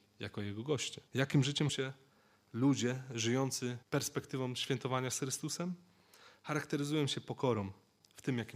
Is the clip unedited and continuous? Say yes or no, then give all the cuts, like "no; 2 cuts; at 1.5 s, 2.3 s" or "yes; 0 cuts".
no; 3 cuts; at 1.1 s, 1.7 s, 3.8 s